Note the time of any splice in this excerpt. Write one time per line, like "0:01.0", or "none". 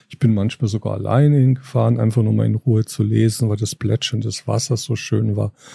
none

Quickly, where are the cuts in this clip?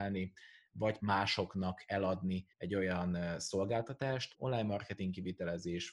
0:01.0
0:02.5
0:04.3

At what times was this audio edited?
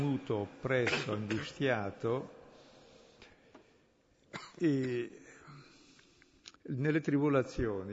0:06.6

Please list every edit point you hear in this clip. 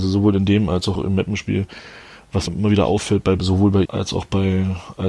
0:01.0
0:02.5
0:03.4
0:03.9

